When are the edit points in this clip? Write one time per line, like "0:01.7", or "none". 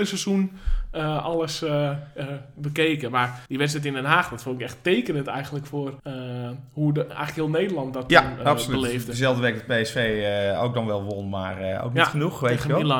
0:03.5
0:06.0